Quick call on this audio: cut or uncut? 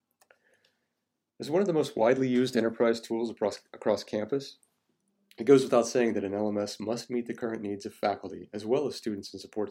uncut